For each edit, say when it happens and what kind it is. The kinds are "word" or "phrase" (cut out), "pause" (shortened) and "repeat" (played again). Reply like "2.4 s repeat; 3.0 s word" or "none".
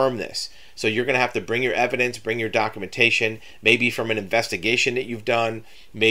none